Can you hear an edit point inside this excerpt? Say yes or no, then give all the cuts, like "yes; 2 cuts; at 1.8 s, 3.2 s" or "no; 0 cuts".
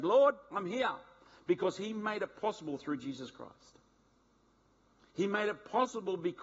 no; 0 cuts